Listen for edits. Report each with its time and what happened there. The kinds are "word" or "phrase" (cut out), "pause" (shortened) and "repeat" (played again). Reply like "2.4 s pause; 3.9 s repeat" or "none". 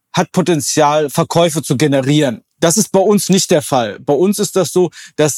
2.5 s pause